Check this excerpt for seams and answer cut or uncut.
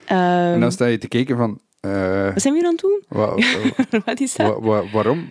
uncut